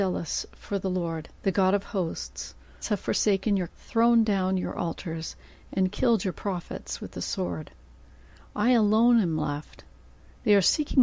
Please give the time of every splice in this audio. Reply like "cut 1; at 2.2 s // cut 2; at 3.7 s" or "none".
cut 1; at 1.4 s // cut 2; at 2.8 s // cut 3; at 3.7 s